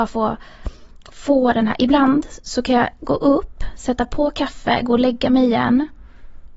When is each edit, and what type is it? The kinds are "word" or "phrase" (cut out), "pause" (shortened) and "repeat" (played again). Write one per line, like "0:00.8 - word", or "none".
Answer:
none